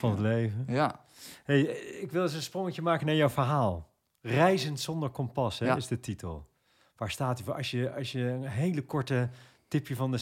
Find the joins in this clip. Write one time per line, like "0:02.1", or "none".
none